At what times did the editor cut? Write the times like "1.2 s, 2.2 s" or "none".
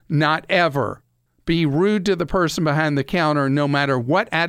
1.3 s